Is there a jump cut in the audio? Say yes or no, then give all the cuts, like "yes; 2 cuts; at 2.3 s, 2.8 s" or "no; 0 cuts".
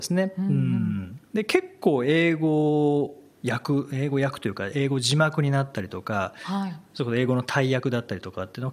yes; 1 cut; at 1.3 s